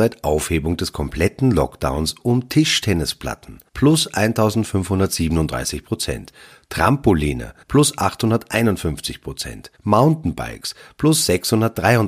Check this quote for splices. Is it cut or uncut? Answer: cut